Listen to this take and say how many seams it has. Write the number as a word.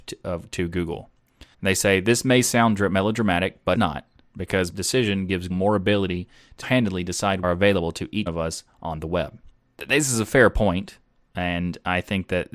eight